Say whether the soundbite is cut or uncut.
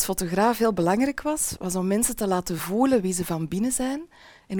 uncut